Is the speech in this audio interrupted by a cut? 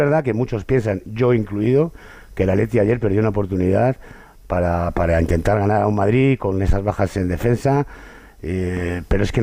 no; 0 cuts

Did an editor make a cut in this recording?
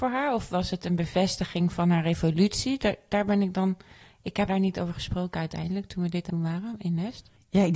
yes; 2 cuts; at 4.5 s, 6.3 s

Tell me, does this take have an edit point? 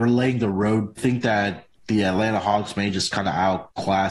yes; 2 cuts; at 1.0 s, 1.8 s

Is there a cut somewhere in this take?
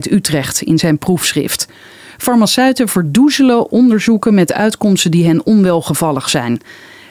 no; 0 cuts

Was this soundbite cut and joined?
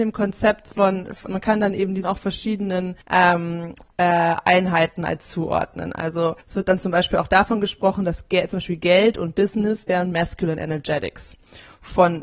yes; 4 cuts; at 1.3 s, 2.0 s, 3.0 s, 6.4 s

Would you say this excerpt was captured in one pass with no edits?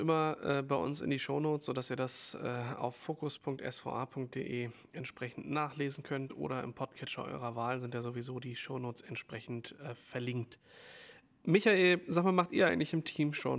yes; 0 cuts

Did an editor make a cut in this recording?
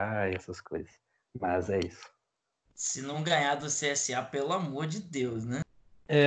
no; 0 cuts

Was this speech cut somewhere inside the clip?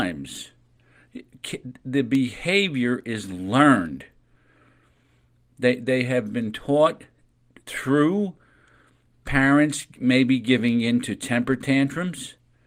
no; 0 cuts

